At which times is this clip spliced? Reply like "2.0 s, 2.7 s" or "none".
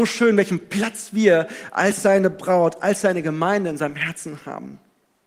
none